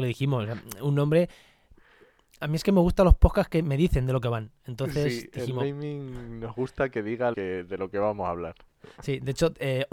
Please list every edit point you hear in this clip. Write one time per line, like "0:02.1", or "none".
0:07.3

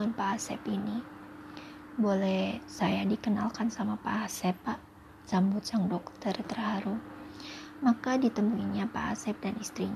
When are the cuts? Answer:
none

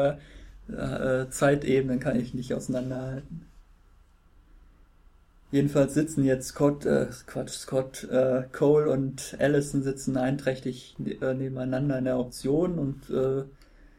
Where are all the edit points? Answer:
none

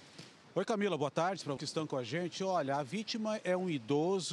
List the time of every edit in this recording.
0:01.6

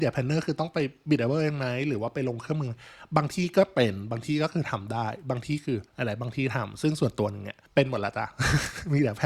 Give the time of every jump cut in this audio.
0:05.9
0:07.7

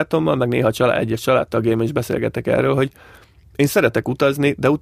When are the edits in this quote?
none

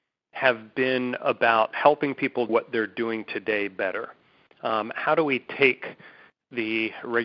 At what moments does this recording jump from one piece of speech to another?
0:02.5

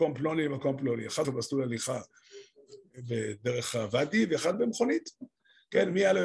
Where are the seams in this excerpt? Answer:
0:01.2
0:04.5

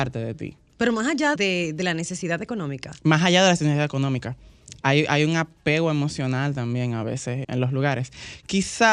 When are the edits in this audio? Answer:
0:01.4
0:07.4

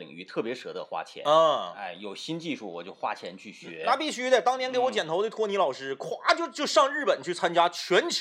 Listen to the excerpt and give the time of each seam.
none

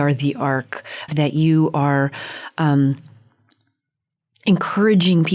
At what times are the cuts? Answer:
0:01.1

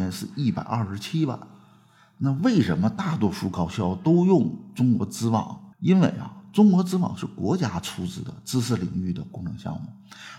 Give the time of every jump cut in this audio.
0:05.7

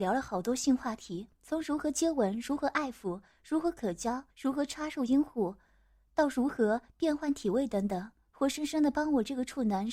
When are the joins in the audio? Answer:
0:01.3
0:04.3

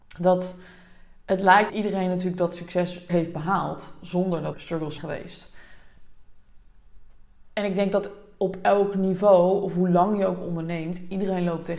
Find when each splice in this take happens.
0:01.7
0:03.1
0:04.5
0:05.0

